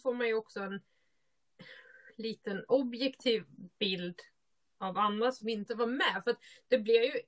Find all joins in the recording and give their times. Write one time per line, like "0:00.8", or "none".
none

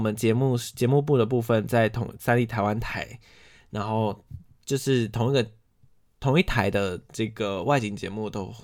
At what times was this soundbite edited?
none

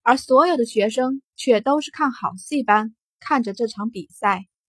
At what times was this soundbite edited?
0:01.3

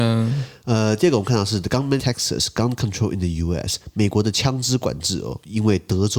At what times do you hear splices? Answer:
0:02.0

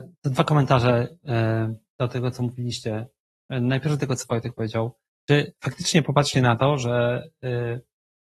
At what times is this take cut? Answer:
none

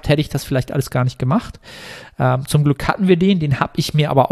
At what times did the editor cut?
none

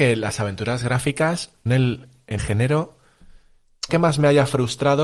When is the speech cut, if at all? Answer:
0:01.7
0:02.4
0:03.9

